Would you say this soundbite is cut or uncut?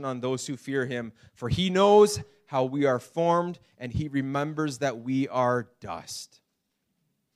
uncut